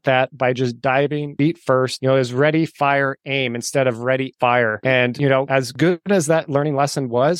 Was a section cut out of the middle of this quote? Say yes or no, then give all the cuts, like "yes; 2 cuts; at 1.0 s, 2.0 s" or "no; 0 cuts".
yes; 1 cut; at 4.3 s